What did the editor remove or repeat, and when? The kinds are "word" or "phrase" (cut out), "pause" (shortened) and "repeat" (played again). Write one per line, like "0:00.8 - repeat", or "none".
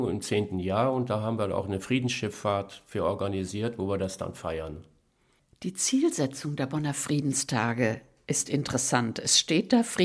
none